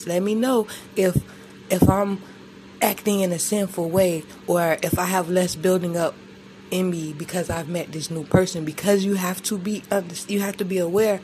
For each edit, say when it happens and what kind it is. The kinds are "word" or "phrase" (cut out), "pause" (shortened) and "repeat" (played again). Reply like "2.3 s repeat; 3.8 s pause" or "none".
none

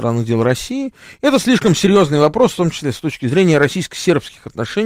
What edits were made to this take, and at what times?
none

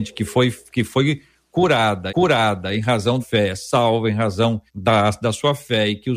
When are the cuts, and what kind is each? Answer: 2.1 s repeat; 3.2 s phrase; 4.7 s pause

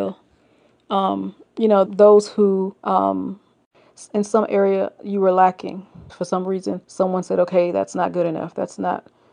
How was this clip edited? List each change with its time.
1.9 s word; 2.8 s pause; 6.1 s word; 6.8 s pause

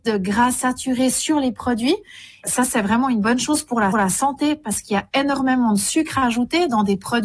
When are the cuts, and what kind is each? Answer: 3.9 s repeat

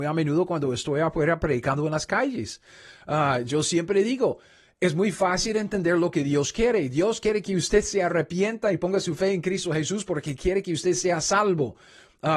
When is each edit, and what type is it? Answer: none

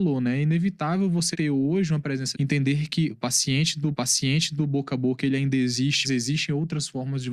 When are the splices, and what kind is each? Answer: 1.3 s word; 2.3 s word; 3.1 s phrase; 3.9 s repeat; 6.0 s word

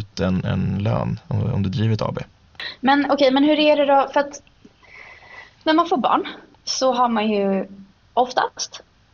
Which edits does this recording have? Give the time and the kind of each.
none

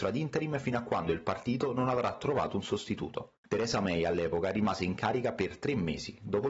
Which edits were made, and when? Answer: 3.5 s pause

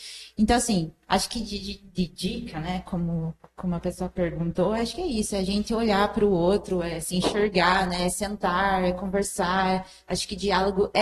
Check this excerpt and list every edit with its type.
none

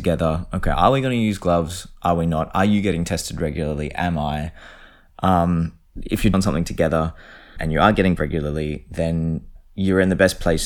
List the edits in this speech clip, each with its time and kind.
6.3 s phrase; 7.6 s word; 8.2 s word

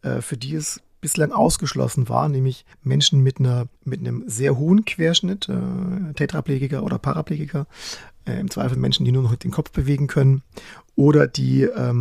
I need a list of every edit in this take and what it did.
2.7 s pause; 3.8 s pause

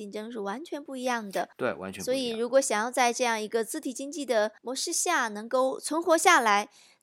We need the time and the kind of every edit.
4.6 s pause

